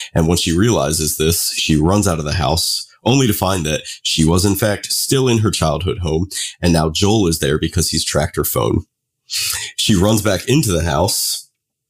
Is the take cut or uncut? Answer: uncut